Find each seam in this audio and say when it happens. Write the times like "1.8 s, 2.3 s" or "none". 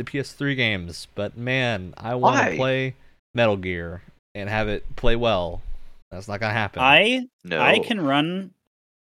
3.2 s, 4.2 s, 6.0 s, 7.3 s